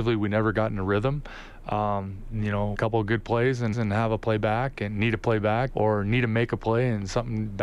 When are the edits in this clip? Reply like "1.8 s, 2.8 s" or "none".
2.7 s, 3.7 s, 5.7 s